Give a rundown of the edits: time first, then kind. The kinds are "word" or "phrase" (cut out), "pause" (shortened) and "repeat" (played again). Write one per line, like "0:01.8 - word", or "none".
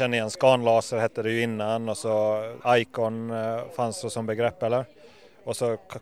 0:02.6 - pause
0:04.0 - word